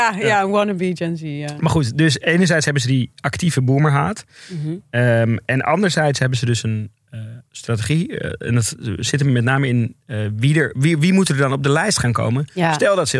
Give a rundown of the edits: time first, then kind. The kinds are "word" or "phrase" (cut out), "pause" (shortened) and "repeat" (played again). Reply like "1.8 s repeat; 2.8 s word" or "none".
none